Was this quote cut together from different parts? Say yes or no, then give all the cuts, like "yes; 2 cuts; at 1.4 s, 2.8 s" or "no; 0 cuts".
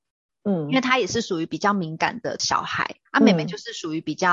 yes; 1 cut; at 3.1 s